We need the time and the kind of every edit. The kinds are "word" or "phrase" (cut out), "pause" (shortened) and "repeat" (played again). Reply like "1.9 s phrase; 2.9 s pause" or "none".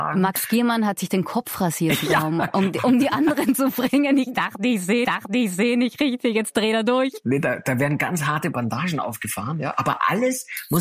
3.5 s phrase; 5.0 s repeat